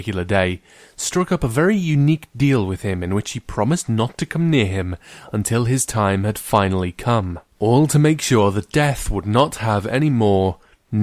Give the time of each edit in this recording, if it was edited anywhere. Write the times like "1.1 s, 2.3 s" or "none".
none